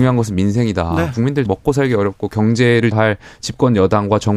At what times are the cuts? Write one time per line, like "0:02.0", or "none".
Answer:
0:01.5
0:02.9